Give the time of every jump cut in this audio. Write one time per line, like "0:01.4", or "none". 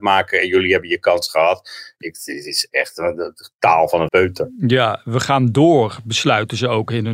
0:04.1

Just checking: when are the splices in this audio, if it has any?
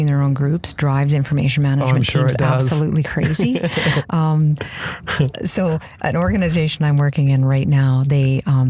none

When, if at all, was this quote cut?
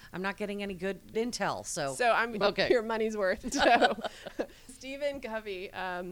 0:01.1
0:02.4
0:03.5
0:04.7

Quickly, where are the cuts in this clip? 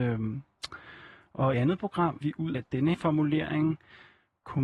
0:01.5
0:02.2
0:02.5
0:02.9

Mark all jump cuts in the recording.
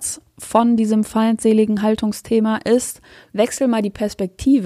none

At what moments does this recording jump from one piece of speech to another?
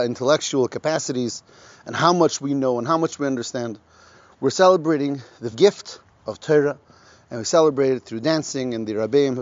0:05.5

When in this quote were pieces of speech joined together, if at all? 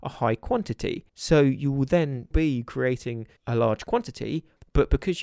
0:01.1
0:02.3
0:03.4

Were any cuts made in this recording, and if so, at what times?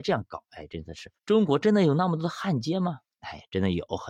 0:01.2

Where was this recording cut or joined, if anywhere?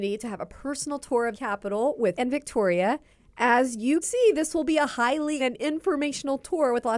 0:01.3
0:02.1
0:03.1
0:04.0
0:05.4

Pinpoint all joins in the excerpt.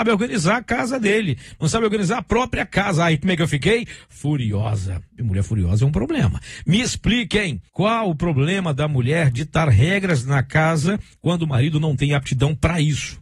0:07.7

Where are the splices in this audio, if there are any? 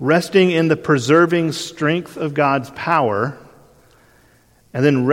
none

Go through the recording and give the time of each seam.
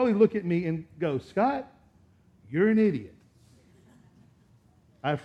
none

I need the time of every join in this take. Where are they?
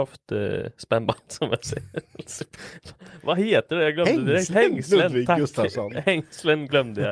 none

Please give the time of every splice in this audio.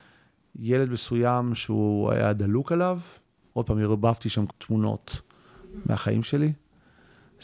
0:04.5

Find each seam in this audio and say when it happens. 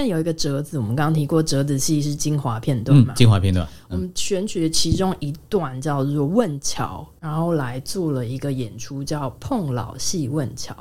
0:07.2

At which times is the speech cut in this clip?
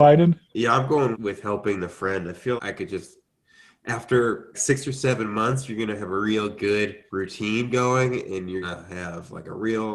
0:01.1
0:02.6
0:04.5
0:07.1
0:08.6

